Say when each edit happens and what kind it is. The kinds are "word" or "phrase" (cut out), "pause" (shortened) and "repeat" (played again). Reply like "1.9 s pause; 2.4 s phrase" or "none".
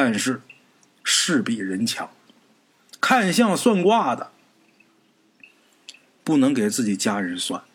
none